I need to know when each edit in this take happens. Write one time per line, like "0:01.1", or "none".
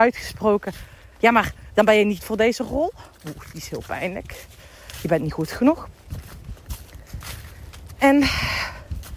0:02.2

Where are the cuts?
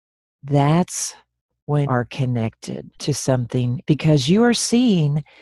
0:01.9
0:03.0
0:03.8

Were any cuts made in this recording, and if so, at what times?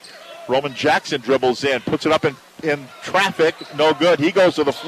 none

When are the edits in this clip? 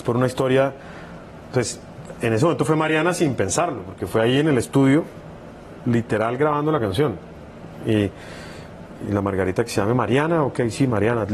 0:09.0

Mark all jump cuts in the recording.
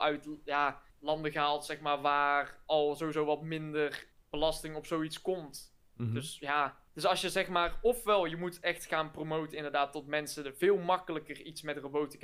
0:00.9
0:04.1
0:06.9

